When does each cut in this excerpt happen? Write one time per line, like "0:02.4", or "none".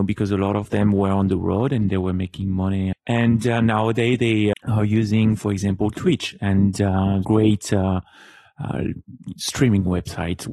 0:02.9
0:04.5
0:07.2